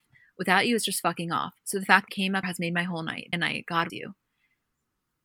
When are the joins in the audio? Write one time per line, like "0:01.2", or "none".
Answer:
0:02.1
0:02.4
0:03.3
0:03.9